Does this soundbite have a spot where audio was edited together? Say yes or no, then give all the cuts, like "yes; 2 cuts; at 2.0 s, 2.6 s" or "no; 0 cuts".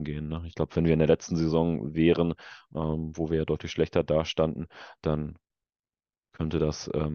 no; 0 cuts